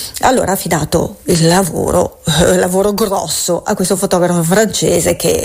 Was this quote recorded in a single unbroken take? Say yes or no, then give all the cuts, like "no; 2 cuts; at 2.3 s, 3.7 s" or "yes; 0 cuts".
yes; 0 cuts